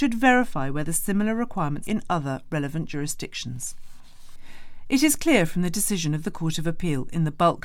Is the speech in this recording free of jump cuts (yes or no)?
no